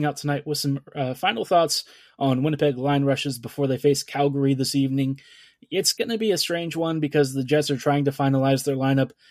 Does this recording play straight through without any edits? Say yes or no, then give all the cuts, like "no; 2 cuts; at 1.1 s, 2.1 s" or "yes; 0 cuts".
yes; 0 cuts